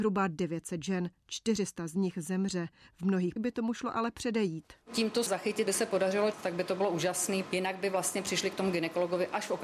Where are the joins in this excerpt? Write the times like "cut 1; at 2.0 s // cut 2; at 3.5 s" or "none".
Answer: cut 1; at 3.4 s // cut 2; at 5.3 s // cut 3; at 5.7 s // cut 4; at 6.3 s // cut 5; at 7.4 s